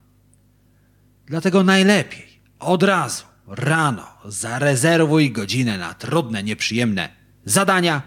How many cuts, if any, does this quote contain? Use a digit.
0